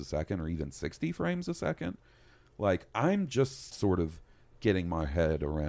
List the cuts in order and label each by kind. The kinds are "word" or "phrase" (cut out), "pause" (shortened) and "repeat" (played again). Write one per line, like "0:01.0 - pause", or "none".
0:03.7 - word